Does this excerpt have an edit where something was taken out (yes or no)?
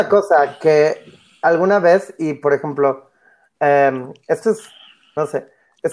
no